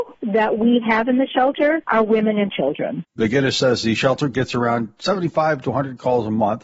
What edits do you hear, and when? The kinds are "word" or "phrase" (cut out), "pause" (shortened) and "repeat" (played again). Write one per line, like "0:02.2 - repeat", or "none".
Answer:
none